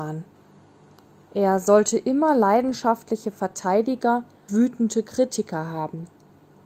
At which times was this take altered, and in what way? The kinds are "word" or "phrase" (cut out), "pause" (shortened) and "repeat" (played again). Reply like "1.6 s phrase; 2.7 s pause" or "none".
4.5 s word